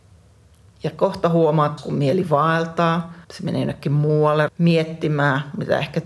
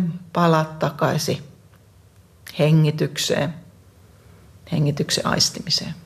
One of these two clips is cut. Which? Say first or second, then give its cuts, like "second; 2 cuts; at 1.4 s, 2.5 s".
first; 3 cuts; at 1.8 s, 3.2 s, 4.5 s